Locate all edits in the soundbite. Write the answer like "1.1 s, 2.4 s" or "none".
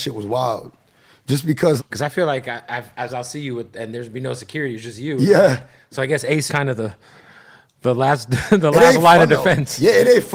1.8 s, 3.1 s, 6.5 s